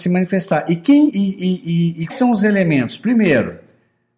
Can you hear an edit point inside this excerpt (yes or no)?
yes